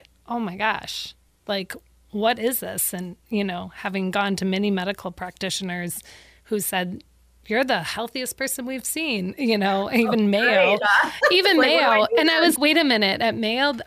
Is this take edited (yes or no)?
yes